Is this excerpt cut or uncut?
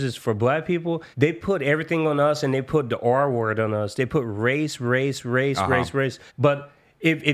cut